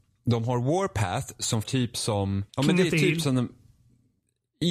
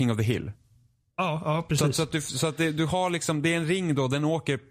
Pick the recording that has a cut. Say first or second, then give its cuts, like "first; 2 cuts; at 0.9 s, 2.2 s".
first; 2 cuts; at 1.6 s, 2.5 s